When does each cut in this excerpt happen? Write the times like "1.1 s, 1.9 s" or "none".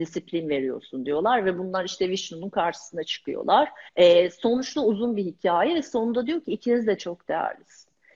3.9 s